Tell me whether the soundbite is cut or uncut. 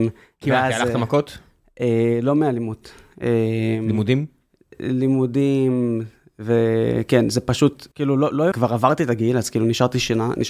cut